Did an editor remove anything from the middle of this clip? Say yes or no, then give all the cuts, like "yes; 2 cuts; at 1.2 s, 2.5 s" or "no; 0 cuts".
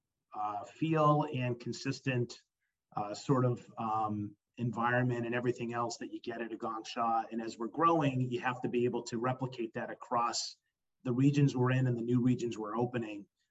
no; 0 cuts